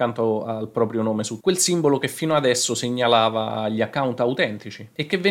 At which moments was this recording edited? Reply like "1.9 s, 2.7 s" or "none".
1.4 s